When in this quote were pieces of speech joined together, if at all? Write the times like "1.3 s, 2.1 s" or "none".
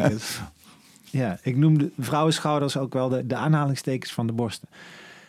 none